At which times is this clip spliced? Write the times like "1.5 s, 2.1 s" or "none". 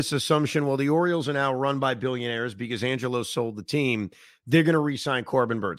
none